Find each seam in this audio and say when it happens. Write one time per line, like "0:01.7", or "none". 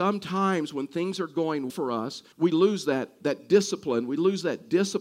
0:01.7
0:02.3